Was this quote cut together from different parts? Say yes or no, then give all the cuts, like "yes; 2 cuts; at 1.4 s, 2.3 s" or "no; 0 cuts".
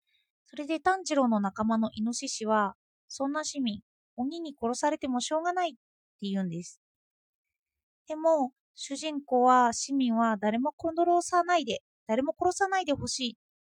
no; 0 cuts